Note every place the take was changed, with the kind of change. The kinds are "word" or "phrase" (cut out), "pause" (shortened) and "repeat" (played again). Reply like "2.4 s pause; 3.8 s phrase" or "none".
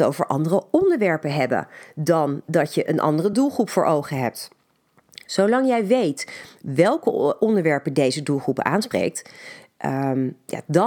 none